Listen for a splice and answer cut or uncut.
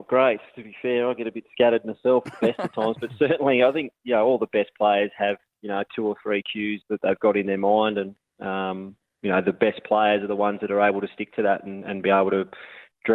cut